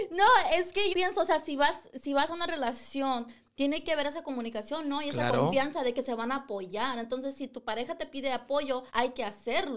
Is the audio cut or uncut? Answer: cut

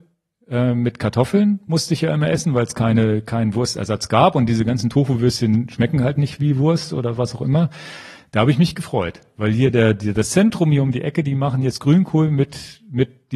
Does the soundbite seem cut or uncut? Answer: uncut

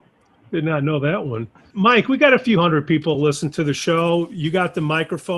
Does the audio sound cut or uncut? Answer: uncut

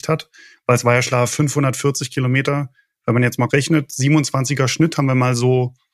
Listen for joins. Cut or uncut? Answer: cut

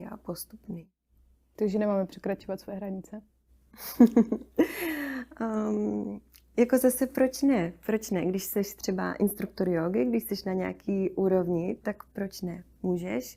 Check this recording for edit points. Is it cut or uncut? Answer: uncut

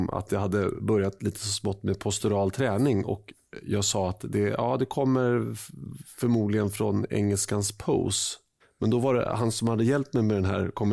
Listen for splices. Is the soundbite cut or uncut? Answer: cut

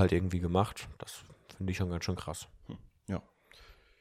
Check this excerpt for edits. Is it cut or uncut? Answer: uncut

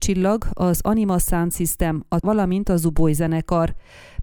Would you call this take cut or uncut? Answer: cut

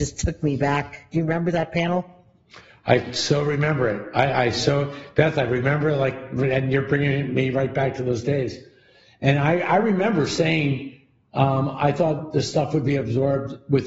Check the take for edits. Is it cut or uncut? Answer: uncut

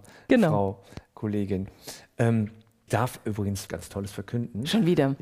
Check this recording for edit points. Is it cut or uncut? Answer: cut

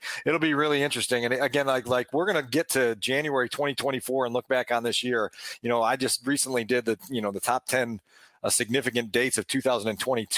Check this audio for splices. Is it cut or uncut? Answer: uncut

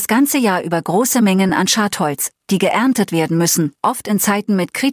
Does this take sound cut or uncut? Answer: uncut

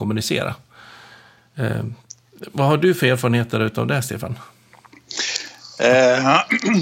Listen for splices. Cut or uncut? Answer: uncut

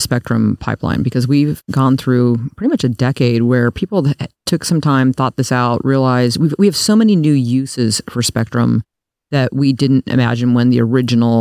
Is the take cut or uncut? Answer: uncut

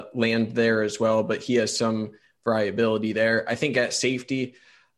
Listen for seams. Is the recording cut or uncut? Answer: uncut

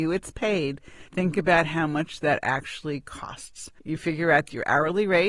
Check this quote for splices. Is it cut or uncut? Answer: cut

